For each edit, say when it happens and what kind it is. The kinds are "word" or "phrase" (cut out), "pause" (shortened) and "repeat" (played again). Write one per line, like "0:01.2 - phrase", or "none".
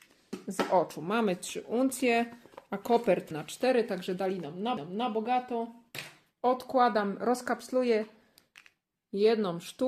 0:03.3 - word
0:04.8 - repeat

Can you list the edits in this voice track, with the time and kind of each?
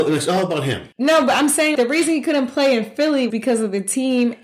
0:00.9 - pause
0:01.8 - word
0:03.3 - word

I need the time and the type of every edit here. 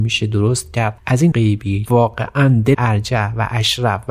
0:01.0 - word
0:01.3 - word
0:01.9 - word
0:02.7 - word

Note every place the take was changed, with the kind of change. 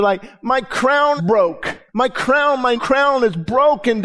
0:01.2 - word
0:01.9 - pause
0:02.8 - word

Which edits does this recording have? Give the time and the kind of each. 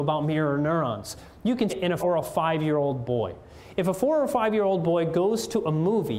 0:01.7 - word
0:02.0 - word

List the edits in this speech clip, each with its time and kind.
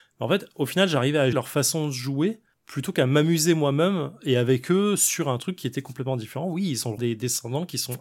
0:01.3 - word
0:02.5 - pause
0:07.0 - phrase

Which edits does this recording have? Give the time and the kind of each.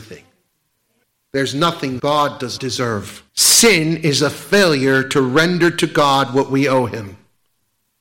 0:01.0 - pause
0:02.0 - word
0:02.6 - word
0:03.3 - pause

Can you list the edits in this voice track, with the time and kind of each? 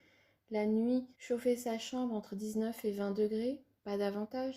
0:01.1 - pause

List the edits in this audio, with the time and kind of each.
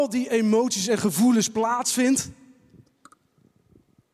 none

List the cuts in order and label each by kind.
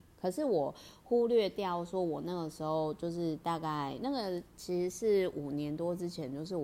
none

